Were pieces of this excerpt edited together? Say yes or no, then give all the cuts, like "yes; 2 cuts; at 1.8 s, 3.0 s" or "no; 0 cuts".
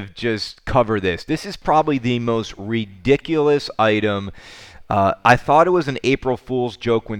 no; 0 cuts